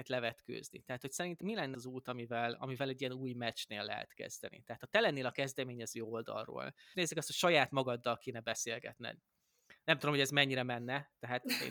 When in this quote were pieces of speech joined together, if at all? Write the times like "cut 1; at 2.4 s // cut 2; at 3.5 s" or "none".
cut 1; at 1.4 s // cut 2; at 1.7 s // cut 3; at 6.9 s